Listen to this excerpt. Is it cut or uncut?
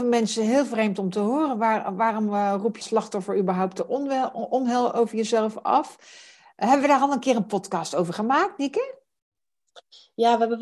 cut